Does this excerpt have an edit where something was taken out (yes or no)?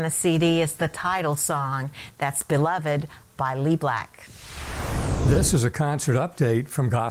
no